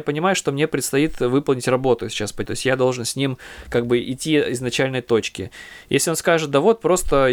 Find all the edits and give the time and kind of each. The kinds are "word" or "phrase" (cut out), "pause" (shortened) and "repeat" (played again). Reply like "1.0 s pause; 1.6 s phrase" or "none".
2.5 s word